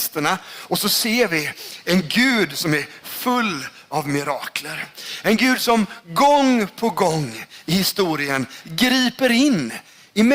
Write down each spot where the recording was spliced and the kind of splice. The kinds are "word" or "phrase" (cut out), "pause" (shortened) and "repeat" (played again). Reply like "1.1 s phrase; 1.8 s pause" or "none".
none